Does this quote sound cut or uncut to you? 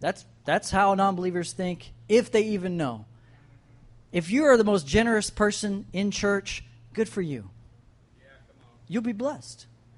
uncut